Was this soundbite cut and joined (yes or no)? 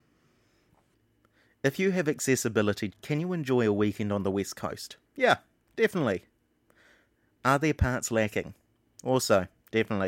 yes